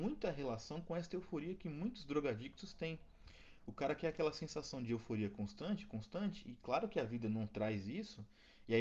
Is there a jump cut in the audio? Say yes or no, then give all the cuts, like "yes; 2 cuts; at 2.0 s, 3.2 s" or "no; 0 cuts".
no; 0 cuts